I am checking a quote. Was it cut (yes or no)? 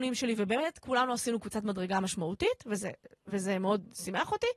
no